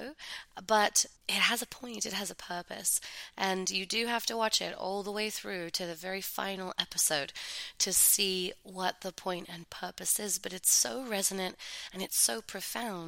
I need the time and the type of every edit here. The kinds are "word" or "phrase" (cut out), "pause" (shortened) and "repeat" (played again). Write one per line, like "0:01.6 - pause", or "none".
0:01.2 - pause